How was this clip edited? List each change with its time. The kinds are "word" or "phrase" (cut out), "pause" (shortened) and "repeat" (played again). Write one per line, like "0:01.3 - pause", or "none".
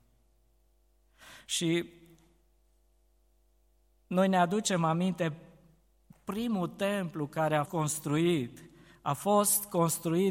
0:07.7 - word